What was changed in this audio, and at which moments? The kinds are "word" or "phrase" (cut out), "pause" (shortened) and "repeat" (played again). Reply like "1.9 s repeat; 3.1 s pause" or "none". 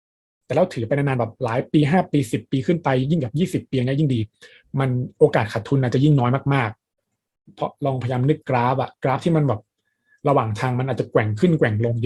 none

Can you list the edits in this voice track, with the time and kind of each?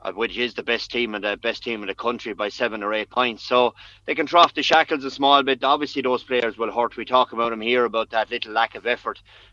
none

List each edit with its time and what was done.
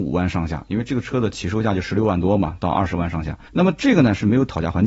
3.5 s pause

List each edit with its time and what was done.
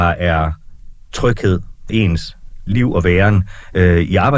1.9 s word; 2.7 s word

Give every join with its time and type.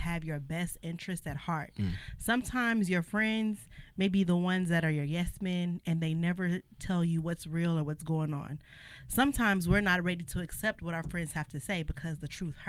none

